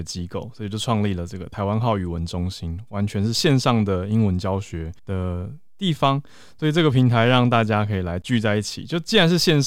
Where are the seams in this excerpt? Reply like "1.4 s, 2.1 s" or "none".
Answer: 5.0 s